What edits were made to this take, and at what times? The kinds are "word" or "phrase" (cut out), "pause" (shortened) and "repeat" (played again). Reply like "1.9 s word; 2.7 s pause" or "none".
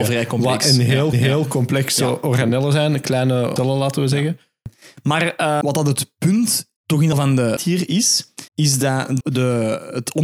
1.1 s repeat; 3.6 s phrase; 5.6 s word; 6.8 s pause; 7.1 s phrase; 7.6 s word; 8.5 s pause; 9.2 s word